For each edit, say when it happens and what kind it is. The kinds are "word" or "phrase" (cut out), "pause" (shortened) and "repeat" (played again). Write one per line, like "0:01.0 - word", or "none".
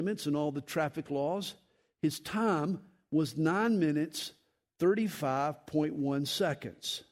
none